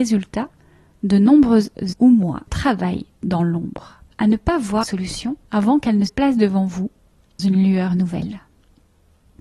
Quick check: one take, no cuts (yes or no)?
no